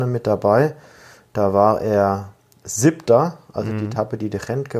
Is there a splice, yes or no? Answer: no